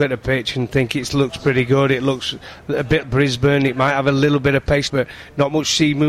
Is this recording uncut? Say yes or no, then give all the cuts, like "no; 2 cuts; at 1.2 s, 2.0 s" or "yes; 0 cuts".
no; 2 cuts; at 3.0 s, 4.9 s